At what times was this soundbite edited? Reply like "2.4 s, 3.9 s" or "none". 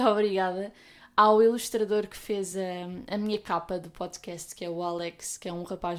none

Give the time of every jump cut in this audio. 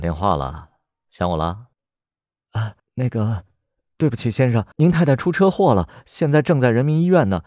1.7 s, 2.8 s, 4.7 s

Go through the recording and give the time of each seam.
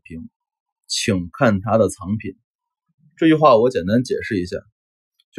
none

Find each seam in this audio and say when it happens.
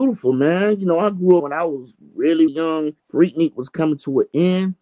1.4 s, 2.5 s, 3.0 s

